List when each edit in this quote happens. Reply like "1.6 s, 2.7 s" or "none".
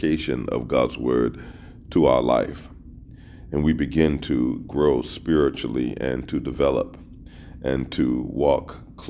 none

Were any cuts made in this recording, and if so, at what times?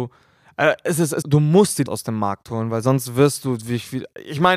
1.2 s, 1.9 s

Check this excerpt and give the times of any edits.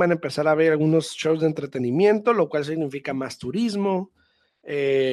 none

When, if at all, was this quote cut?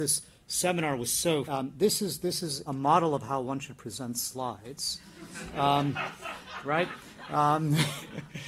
1.4 s, 2.7 s

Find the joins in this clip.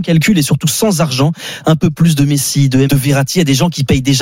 2.9 s

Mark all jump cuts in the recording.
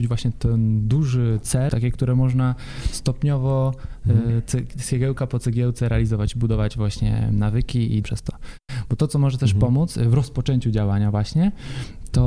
1.7 s, 8.0 s

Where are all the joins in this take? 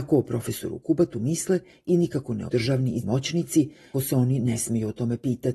2.5 s, 3.0 s, 3.9 s

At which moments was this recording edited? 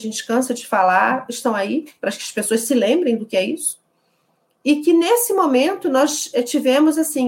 none

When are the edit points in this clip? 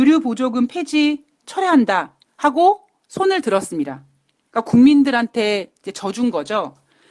1.4 s, 2.2 s

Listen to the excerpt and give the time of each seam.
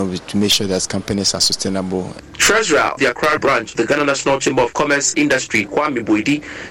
3.0 s, 3.4 s, 3.7 s, 5.1 s

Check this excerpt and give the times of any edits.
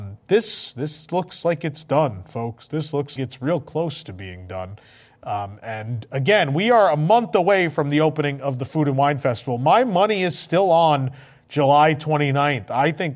3.2 s

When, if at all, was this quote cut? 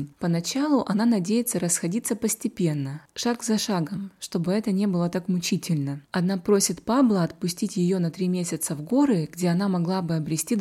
6.0 s

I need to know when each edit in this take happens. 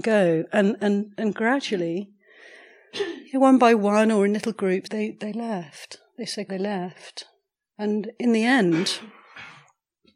4.8 s, 6.5 s

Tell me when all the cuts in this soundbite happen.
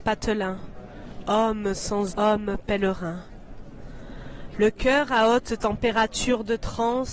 2.1 s

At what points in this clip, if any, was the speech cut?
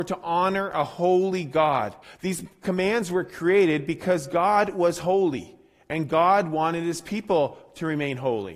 2.0 s

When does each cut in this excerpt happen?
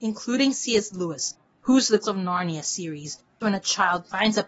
2.0 s, 3.4 s

